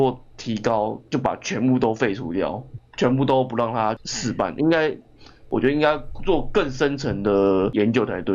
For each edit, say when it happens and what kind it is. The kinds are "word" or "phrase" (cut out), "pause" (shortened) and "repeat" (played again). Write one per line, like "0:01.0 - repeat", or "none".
none